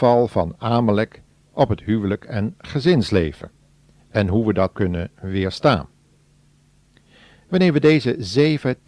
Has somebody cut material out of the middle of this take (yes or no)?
yes